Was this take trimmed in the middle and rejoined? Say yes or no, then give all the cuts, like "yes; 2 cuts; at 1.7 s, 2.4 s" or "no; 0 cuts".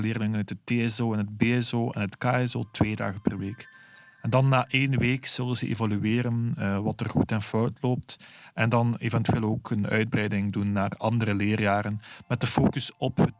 no; 0 cuts